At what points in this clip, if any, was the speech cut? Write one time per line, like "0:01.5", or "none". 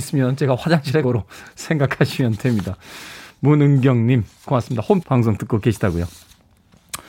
0:01.0
0:04.5
0:05.0